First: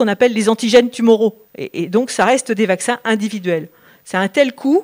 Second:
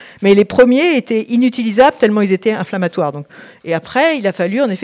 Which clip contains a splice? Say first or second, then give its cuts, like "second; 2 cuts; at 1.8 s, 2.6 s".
first; 1 cut; at 1.5 s